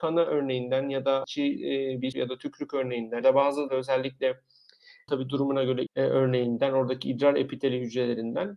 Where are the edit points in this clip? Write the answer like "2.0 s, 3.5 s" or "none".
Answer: 1.2 s, 2.1 s, 3.2 s, 3.7 s, 5.1 s, 5.9 s